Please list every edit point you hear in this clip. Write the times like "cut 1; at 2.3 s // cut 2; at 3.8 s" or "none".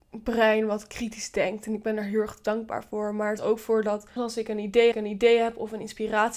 cut 1; at 3.4 s // cut 2; at 4.2 s // cut 3; at 4.9 s